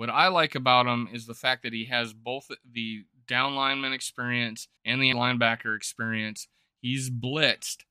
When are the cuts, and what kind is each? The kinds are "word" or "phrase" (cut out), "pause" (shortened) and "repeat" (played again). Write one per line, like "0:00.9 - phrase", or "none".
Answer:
0:04.8 - pause
0:05.1 - word